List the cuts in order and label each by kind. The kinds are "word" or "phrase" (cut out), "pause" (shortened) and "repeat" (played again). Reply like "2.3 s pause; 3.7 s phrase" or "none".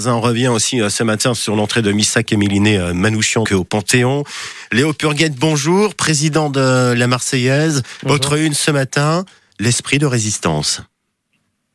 3.5 s word